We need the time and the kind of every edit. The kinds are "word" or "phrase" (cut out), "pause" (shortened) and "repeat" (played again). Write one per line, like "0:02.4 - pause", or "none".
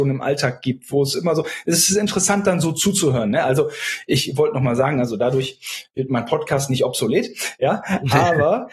none